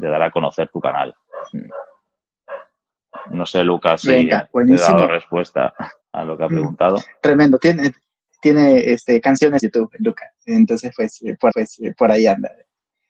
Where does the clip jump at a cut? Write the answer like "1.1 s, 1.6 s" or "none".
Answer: 6.0 s, 8.3 s, 9.6 s, 11.5 s